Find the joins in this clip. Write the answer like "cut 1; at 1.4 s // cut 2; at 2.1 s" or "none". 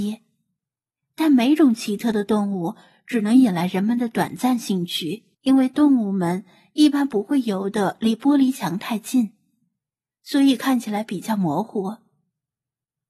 cut 1; at 5.3 s